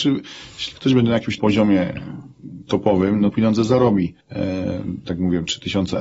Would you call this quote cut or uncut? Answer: cut